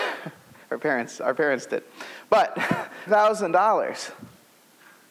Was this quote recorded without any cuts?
no; 1 cut; at 3.1 s

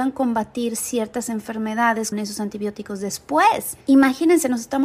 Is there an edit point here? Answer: yes; 2 cuts; at 2.1 s, 3.8 s

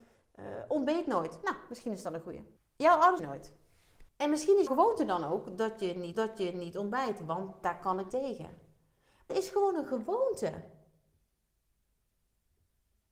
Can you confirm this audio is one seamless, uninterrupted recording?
no; 7 cuts; at 2.6 s, 3.2 s, 4.1 s, 4.7 s, 6.1 s, 8.1 s, 9.3 s

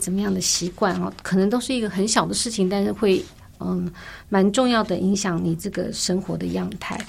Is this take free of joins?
yes; 0 cuts

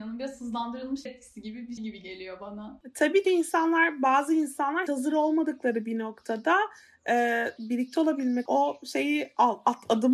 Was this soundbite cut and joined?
yes; 6 cuts; at 1.1 s, 1.8 s, 3.2 s, 4.9 s, 7.6 s, 8.5 s

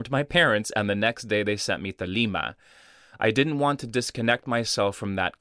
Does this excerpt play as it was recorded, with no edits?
yes; 0 cuts

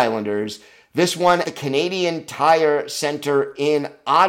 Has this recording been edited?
yes; 1 cut; at 1.4 s

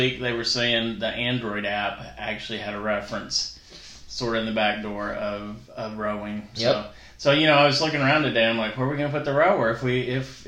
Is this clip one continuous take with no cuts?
yes; 0 cuts

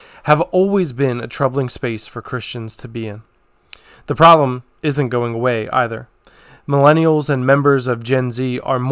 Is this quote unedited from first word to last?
yes; 0 cuts

